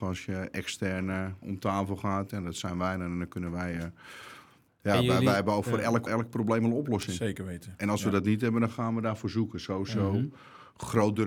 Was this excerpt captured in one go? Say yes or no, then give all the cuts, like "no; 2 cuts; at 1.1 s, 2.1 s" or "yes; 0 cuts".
no; 2 cuts; at 1.4 s, 6.1 s